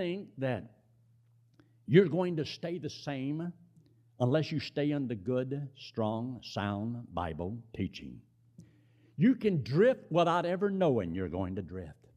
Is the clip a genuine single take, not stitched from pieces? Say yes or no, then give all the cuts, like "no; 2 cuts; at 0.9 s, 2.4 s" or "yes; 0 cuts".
yes; 0 cuts